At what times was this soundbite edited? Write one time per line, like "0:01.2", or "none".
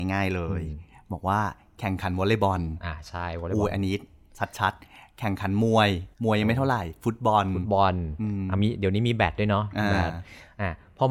0:06.1